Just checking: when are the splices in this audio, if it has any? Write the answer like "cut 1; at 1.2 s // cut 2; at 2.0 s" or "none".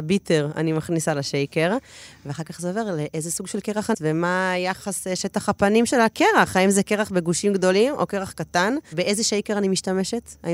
cut 1; at 3.9 s